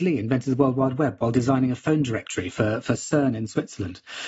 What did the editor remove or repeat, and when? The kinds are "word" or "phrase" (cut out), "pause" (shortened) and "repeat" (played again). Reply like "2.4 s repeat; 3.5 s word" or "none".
none